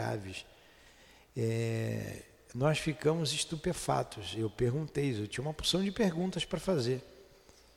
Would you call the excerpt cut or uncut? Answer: uncut